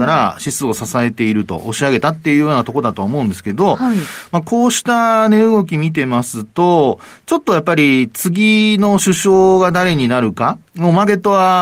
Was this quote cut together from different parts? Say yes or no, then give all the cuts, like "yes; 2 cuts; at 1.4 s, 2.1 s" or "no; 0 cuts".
yes; 1 cut; at 10.7 s